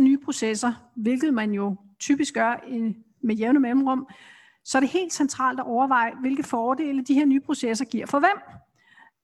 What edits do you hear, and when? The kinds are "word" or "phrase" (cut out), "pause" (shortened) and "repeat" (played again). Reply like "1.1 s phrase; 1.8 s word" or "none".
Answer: none